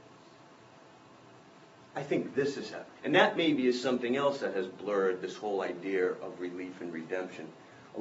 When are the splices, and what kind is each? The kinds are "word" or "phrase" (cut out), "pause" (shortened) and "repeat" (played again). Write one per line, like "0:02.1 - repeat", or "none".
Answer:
0:03.0 - pause